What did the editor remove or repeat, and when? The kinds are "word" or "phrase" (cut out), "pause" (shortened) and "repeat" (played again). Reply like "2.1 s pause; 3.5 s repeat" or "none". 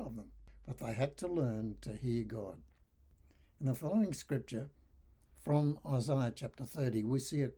none